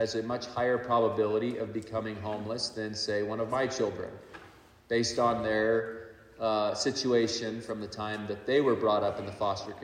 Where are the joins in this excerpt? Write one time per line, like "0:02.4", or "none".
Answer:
none

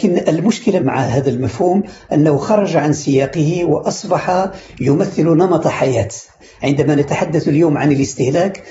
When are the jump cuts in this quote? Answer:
none

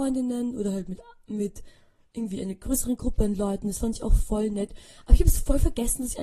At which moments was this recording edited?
none

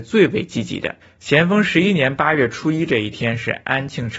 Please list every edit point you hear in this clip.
0:01.0

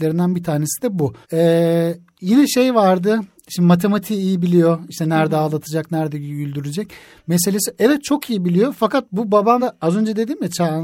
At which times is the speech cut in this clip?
0:01.2
0:09.6

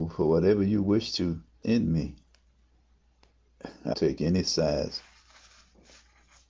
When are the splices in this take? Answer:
0:01.6
0:03.9

